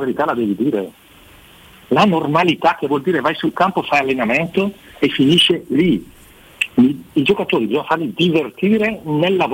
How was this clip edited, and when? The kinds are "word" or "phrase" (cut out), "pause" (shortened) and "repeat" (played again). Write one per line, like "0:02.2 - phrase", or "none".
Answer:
none